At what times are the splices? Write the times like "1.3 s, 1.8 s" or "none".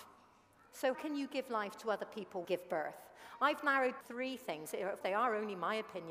0.9 s, 2.4 s, 4.0 s, 5.0 s